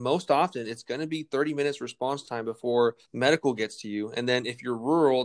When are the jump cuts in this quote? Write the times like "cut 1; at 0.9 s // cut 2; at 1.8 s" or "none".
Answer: cut 1; at 3.0 s